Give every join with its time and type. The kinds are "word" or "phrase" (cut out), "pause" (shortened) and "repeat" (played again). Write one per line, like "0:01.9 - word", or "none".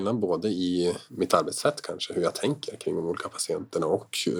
0:01.1 - pause